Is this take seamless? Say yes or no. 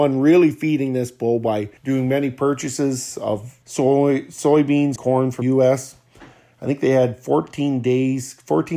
no